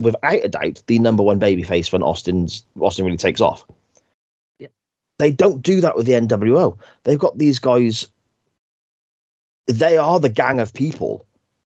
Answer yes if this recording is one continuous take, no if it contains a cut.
yes